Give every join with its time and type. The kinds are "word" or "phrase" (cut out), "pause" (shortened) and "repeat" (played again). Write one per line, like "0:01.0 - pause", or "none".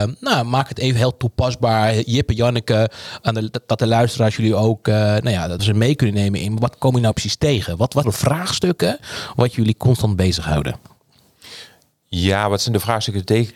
0:05.6 - word
0:08.0 - phrase